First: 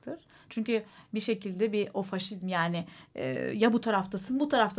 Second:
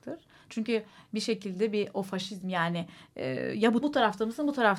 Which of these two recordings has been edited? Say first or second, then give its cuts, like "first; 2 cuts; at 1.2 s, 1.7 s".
second; 1 cut; at 3.8 s